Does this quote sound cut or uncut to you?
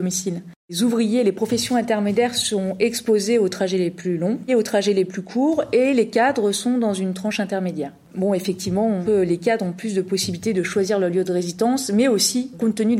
cut